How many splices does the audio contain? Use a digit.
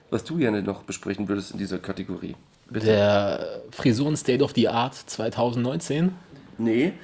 1